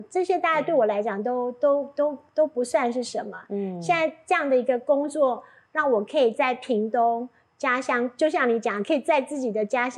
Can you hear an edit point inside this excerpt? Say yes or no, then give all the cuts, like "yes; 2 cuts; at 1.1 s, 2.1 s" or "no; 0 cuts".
no; 0 cuts